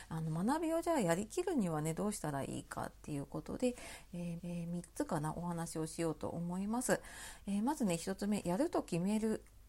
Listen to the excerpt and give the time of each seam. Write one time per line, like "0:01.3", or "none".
0:04.4